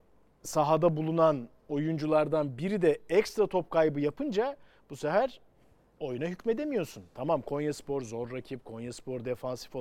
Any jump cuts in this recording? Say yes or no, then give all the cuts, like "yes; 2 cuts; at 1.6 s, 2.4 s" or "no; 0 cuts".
no; 0 cuts